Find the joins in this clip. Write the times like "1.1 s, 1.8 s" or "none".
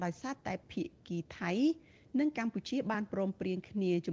none